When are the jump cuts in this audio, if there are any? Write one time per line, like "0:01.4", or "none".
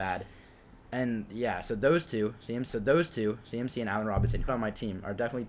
0:02.7
0:04.5

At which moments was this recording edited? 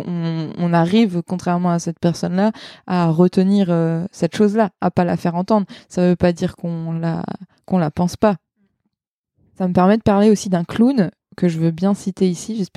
none

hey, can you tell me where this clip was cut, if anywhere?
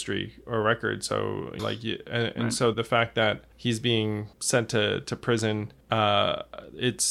0:01.6
0:02.7
0:03.5
0:04.3
0:05.8

